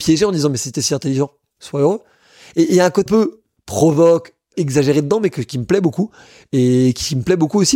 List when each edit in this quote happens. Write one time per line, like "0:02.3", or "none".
0:03.1
0:04.5

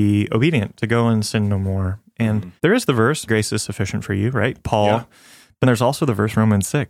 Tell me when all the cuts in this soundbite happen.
0:02.6
0:03.3
0:05.6

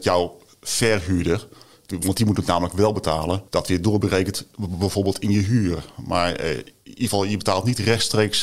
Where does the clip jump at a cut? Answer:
0:03.5

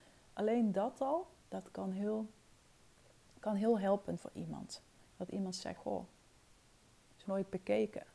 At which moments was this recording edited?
0:01.4
0:04.2
0:05.1
0:05.8
0:07.3

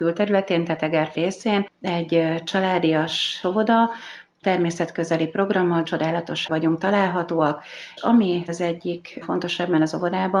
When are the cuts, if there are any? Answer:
0:01.1
0:03.4
0:05.8
0:06.5
0:08.0
0:08.5
0:09.2

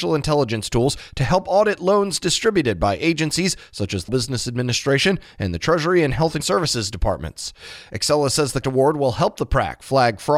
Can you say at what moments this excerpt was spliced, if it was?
0:04.1
0:06.4
0:08.6

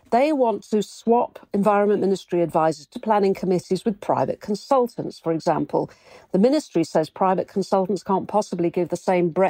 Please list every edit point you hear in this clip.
none

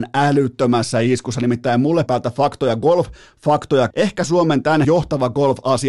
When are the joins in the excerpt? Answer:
0:02.1
0:03.9
0:04.8

